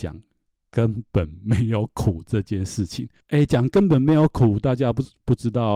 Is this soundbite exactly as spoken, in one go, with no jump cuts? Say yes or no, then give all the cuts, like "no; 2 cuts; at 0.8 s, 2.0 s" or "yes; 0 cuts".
yes; 0 cuts